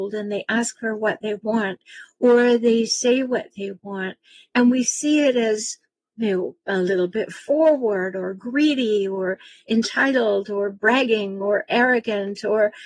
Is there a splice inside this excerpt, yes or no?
no